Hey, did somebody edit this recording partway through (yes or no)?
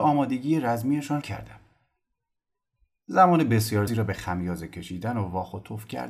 yes